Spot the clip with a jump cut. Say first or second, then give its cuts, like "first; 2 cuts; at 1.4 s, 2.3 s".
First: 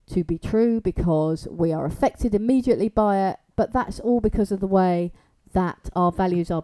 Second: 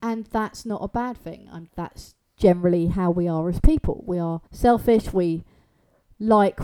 second; 2 cuts; at 1.7 s, 4.5 s